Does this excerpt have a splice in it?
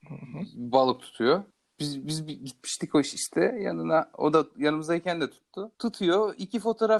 yes; 2 cuts; at 1.5 s, 5.7 s

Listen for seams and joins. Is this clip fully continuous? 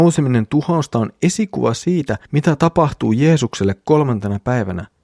no; 1 cut; at 2.3 s

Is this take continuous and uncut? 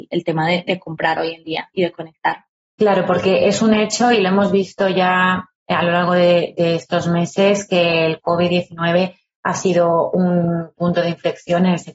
yes; 0 cuts

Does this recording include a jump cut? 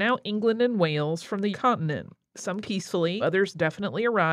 yes; 3 cuts; at 1.5 s, 2.6 s, 3.2 s

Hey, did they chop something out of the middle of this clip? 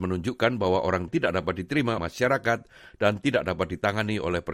yes; 2 cuts; at 1.1 s, 2.0 s

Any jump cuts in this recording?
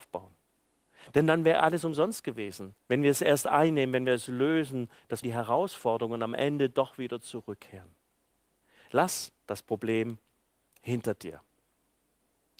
yes; 3 cuts; at 2.8 s, 5.2 s, 9.4 s

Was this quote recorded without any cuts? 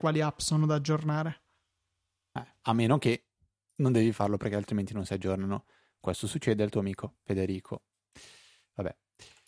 yes; 0 cuts

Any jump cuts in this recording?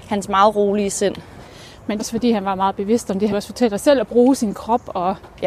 yes; 2 cuts; at 2.0 s, 3.3 s

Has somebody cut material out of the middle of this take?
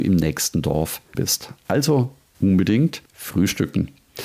yes; 2 cuts; at 1.1 s, 3.0 s

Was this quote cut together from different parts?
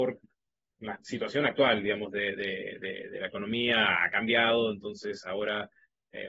no; 0 cuts

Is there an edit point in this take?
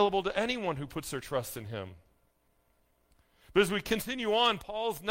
no; 0 cuts

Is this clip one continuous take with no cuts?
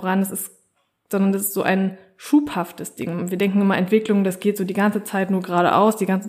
yes; 0 cuts

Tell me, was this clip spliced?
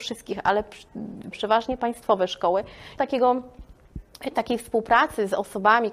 yes; 2 cuts; at 1.3 s, 3.0 s

